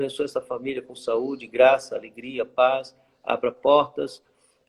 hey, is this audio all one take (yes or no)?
yes